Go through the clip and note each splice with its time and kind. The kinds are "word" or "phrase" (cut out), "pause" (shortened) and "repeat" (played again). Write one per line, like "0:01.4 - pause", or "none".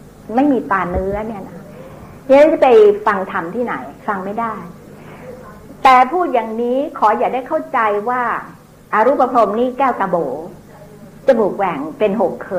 0:04.0 - pause
0:08.7 - pause